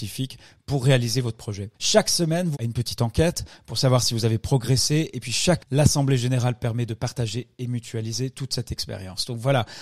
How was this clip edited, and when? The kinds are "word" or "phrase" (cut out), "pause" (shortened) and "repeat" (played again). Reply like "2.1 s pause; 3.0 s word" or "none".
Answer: 1.7 s pause; 2.5 s word; 5.6 s word